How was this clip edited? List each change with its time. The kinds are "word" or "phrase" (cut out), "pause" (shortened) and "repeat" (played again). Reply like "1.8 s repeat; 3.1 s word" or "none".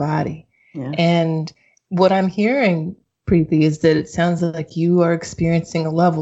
none